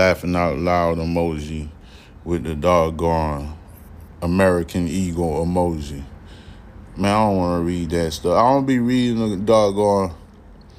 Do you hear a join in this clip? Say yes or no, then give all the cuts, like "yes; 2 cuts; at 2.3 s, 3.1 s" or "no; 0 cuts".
no; 0 cuts